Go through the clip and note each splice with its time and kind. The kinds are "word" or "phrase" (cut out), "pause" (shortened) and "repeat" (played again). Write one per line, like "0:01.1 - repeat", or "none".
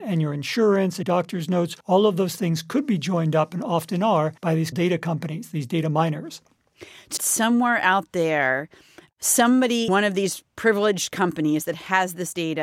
0:01.0 - word
0:01.8 - pause
0:04.4 - pause
0:04.7 - word
0:07.2 - phrase
0:09.9 - word